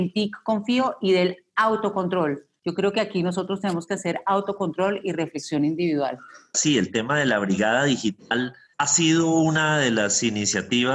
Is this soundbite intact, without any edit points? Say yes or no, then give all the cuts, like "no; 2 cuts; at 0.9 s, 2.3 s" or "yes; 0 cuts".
yes; 0 cuts